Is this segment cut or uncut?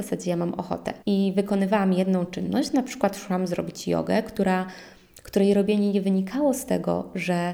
cut